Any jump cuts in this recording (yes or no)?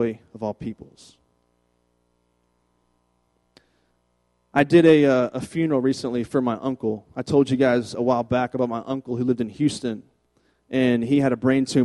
no